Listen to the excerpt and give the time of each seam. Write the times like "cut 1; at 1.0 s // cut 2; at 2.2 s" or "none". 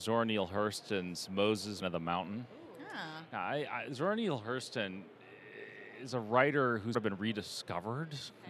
cut 1; at 1.8 s // cut 2; at 6.9 s